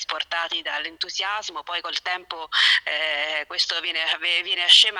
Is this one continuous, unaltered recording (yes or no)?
yes